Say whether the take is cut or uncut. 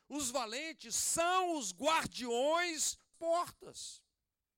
cut